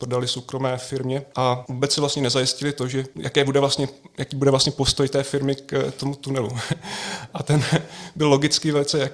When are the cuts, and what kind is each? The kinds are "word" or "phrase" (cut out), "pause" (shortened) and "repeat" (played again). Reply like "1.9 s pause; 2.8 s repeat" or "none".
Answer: none